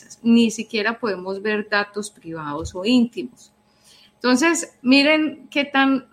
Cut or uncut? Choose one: uncut